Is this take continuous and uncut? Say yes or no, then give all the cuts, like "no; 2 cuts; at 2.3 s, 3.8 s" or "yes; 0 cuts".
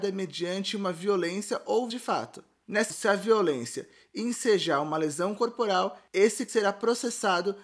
no; 3 cuts; at 1.9 s, 2.9 s, 6.5 s